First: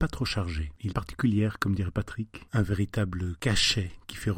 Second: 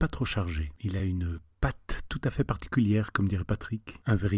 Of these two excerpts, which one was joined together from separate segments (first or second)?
first